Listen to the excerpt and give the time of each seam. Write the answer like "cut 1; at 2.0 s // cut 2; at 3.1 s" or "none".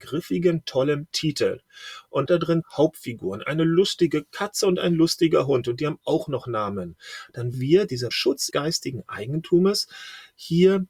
cut 1; at 2.3 s // cut 2; at 2.6 s // cut 3; at 7.5 s // cut 4; at 8.1 s // cut 5; at 8.5 s